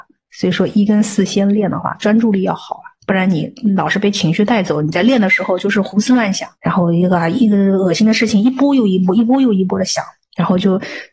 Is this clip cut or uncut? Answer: cut